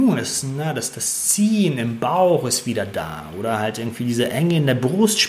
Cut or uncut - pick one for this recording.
uncut